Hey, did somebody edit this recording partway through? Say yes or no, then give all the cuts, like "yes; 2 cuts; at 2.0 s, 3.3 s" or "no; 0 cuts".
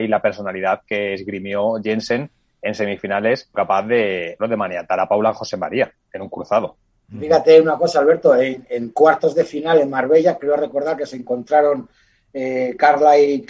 yes; 2 cuts; at 3.5 s, 4.4 s